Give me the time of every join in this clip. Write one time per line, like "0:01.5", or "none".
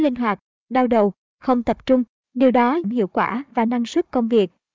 0:02.8